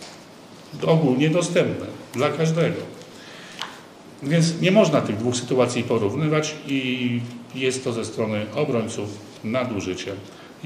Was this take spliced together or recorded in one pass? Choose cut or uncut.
uncut